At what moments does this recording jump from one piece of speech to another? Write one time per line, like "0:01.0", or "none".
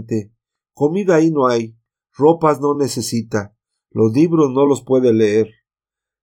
none